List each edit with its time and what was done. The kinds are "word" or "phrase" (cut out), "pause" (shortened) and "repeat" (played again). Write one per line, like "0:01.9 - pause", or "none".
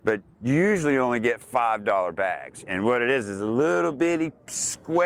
none